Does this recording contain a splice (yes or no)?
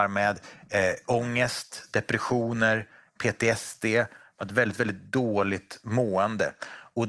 no